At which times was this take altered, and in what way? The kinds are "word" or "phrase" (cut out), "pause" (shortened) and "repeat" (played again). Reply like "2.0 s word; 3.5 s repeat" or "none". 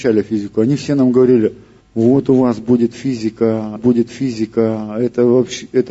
1.8 s pause; 3.8 s repeat

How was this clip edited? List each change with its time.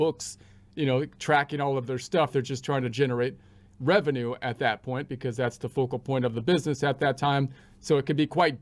none

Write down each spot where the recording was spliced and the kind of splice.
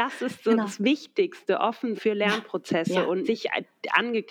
1.9 s word; 3.2 s word

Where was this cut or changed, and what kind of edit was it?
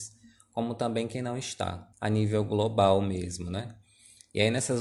1.9 s pause

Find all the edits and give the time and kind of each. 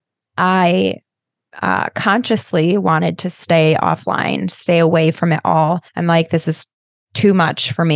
5.9 s pause

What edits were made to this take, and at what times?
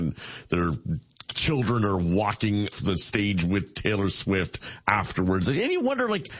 2.7 s word

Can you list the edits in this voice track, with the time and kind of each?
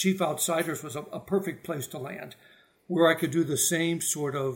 none

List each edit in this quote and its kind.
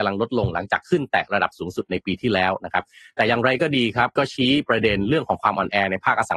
4.2 s word

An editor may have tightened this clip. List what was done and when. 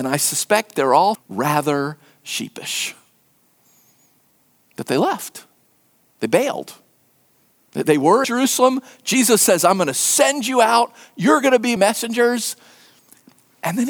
1.1 s word; 7.8 s word; 8.2 s word; 11.8 s word

